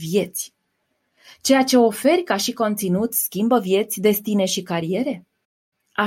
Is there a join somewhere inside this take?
no; 0 cuts

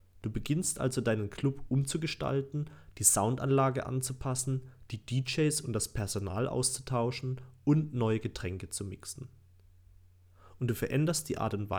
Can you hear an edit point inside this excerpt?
no; 0 cuts

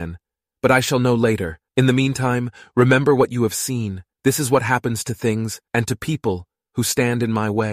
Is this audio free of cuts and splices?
no; 3 cuts; at 1.7 s, 4.1 s, 5.7 s

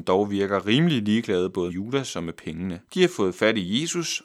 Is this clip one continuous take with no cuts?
no; 2 cuts; at 1.7 s, 2.8 s

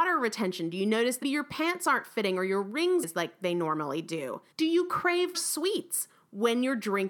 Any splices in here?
yes; 4 cuts; at 1.2 s, 3.0 s, 4.5 s, 5.3 s

